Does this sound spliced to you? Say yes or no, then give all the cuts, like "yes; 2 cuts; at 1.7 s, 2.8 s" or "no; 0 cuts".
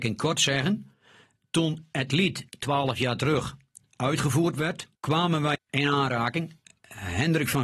yes; 3 cuts; at 2.5 s, 4.9 s, 5.5 s